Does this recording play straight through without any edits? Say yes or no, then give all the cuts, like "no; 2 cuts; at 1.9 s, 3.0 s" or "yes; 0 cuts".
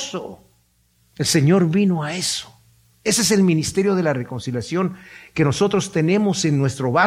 yes; 0 cuts